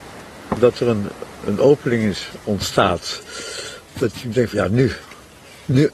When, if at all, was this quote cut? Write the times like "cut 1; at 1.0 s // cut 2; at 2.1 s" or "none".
cut 1; at 1.4 s // cut 2; at 4.5 s